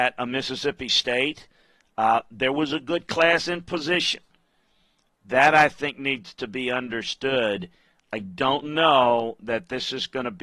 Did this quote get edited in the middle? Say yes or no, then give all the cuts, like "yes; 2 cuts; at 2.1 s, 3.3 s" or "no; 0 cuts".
no; 0 cuts